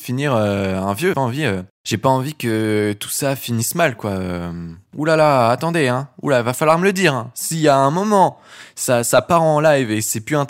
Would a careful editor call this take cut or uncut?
cut